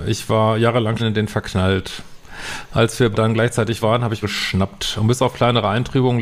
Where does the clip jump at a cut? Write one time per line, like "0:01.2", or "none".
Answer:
0:01.0
0:03.1
0:03.8
0:04.2